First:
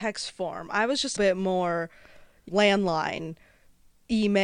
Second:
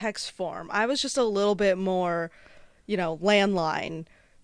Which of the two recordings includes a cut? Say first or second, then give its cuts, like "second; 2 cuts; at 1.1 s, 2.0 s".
first; 2 cuts; at 1.2 s, 2.5 s